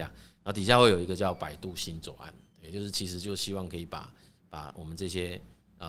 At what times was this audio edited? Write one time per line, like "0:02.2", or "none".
none